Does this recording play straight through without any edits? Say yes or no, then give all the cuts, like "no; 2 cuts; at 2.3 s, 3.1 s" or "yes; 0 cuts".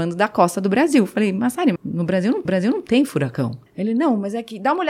no; 3 cuts; at 1.8 s, 2.5 s, 3.7 s